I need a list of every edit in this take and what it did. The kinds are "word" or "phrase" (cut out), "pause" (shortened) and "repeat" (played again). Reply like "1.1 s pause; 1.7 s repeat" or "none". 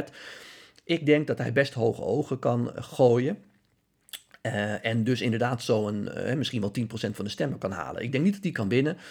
none